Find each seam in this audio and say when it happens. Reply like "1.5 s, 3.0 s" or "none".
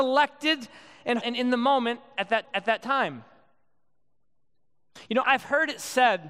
1.2 s, 2.4 s, 5.2 s